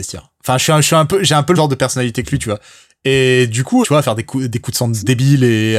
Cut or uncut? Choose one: cut